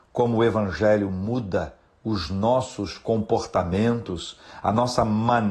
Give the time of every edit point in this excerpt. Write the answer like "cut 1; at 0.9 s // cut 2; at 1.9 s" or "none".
none